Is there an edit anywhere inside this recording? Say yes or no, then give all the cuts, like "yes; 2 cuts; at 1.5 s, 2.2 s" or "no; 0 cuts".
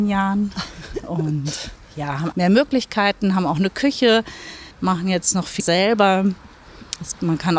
yes; 3 cuts; at 2.3 s, 4.7 s, 5.6 s